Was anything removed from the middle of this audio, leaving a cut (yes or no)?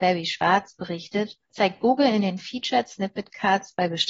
no